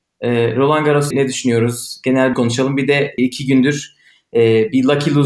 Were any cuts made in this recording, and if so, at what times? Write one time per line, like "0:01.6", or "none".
0:01.1
0:02.3
0:03.2